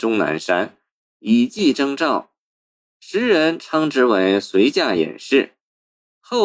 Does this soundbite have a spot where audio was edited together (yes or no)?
no